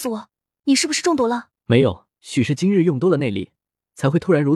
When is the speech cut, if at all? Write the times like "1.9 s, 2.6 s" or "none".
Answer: 1.6 s, 2.1 s